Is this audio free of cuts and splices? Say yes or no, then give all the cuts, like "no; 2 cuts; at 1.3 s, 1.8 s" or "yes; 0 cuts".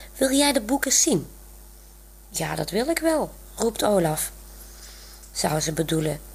yes; 0 cuts